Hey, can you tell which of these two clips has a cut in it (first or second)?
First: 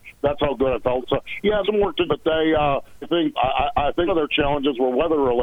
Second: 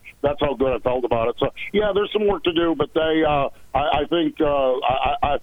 first